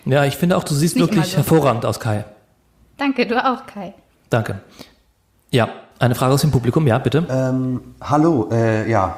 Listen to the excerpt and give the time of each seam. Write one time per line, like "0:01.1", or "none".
none